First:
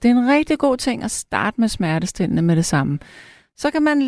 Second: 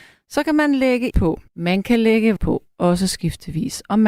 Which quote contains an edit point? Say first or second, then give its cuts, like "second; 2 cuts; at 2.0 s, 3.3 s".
second; 3 cuts; at 1.1 s, 1.5 s, 2.4 s